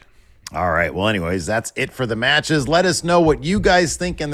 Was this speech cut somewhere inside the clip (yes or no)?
no